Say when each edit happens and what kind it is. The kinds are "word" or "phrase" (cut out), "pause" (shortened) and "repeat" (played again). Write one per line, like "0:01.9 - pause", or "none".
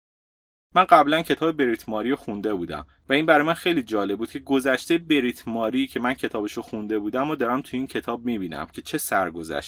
none